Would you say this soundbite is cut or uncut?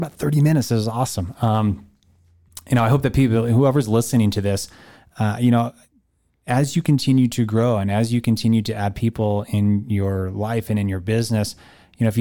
uncut